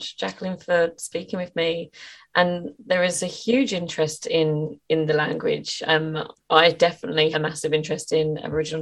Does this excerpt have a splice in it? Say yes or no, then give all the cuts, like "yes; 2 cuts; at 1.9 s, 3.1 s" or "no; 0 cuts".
yes; 1 cut; at 7.3 s